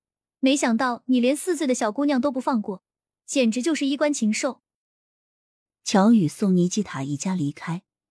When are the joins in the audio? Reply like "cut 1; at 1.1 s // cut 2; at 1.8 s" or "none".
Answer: none